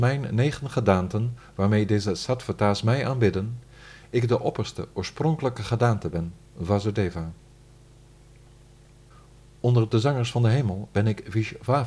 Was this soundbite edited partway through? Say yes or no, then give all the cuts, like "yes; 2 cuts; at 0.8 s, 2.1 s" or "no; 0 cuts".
no; 0 cuts